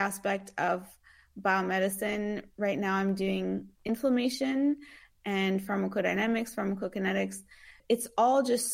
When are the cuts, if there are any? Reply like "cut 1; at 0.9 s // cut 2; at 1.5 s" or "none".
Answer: cut 1; at 3.8 s // cut 2; at 7.8 s